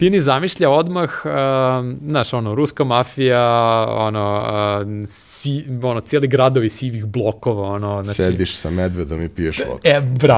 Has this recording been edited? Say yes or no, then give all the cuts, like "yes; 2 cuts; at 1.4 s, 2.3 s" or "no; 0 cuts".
no; 0 cuts